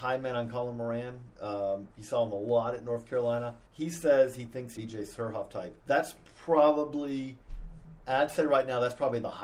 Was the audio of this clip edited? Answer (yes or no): yes